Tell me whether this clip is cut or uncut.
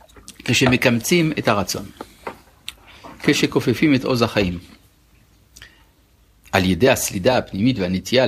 uncut